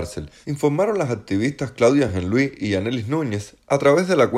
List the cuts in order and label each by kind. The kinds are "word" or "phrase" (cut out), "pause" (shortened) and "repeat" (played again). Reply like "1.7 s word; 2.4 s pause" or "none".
none